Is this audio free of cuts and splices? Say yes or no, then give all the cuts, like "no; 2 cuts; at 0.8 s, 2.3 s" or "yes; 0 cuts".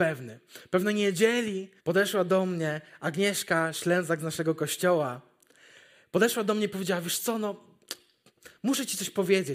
no; 1 cut; at 1.8 s